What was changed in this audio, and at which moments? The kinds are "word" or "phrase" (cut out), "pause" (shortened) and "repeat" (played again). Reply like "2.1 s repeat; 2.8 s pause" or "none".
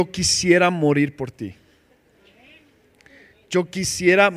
none